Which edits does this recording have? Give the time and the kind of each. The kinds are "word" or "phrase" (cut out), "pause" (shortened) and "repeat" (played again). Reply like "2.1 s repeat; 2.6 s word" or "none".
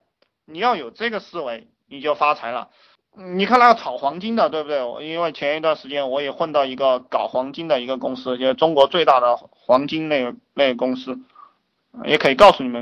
none